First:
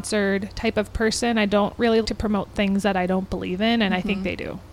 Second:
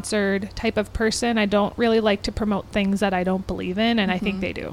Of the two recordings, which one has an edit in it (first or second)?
first